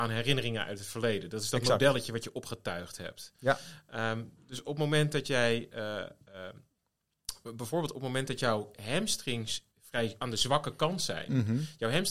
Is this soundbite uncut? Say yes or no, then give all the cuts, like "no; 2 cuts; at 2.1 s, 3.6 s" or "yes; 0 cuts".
no; 1 cut; at 9.7 s